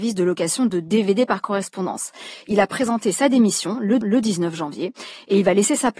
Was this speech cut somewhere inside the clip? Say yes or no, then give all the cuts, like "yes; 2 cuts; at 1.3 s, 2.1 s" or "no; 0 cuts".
yes; 1 cut; at 4.0 s